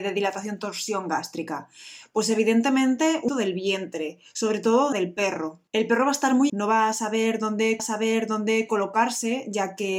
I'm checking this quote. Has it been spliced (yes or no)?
yes